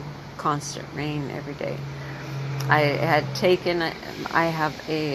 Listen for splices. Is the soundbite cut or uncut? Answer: uncut